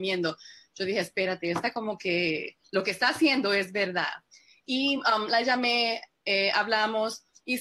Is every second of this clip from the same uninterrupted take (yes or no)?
yes